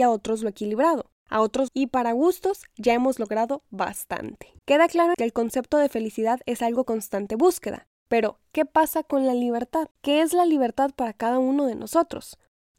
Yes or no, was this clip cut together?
yes